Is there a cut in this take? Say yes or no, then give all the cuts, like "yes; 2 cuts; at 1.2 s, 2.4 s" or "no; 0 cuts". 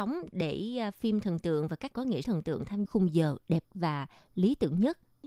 yes; 4 cuts; at 1.9 s, 2.2 s, 2.9 s, 3.6 s